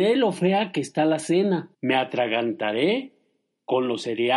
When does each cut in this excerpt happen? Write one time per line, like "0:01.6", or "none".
0:01.7